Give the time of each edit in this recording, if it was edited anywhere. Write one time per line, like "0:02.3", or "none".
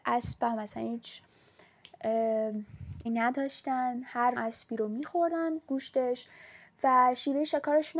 0:03.1
0:04.4
0:05.7